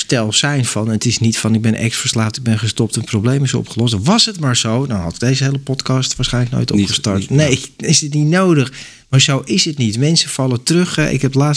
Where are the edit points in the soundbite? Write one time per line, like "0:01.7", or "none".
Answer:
none